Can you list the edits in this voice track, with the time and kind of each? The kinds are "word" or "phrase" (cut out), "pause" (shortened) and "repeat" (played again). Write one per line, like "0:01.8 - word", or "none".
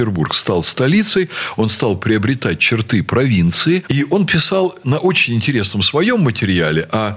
none